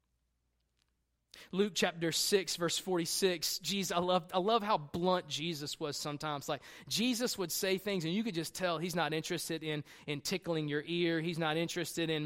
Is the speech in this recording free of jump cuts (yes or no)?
yes